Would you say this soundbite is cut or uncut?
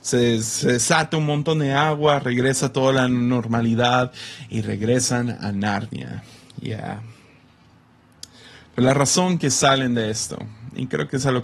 uncut